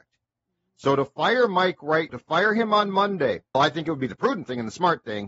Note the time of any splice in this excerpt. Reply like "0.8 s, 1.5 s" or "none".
2.1 s, 3.5 s